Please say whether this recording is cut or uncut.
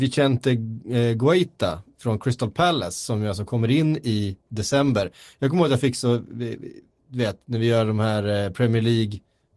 uncut